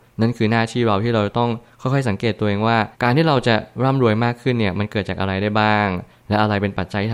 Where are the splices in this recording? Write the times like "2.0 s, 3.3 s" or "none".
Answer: 2.9 s